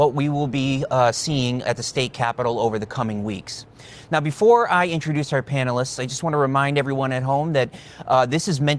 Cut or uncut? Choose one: uncut